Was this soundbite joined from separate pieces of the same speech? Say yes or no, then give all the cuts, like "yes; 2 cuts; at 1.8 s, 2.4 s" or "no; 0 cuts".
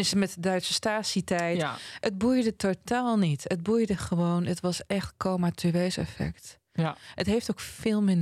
no; 0 cuts